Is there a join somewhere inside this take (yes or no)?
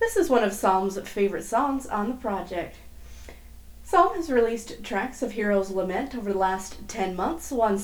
no